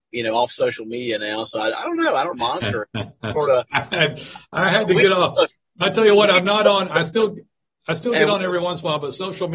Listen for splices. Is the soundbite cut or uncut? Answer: cut